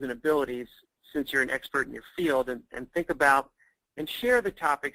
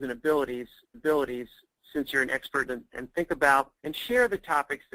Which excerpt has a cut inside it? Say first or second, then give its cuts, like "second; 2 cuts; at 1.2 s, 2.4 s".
second; 3 cuts; at 0.9 s, 2.7 s, 3.8 s